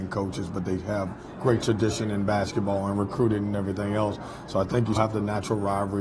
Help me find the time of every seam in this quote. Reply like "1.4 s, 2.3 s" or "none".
5.0 s